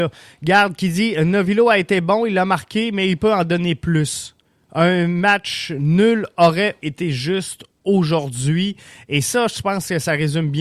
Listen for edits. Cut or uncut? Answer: cut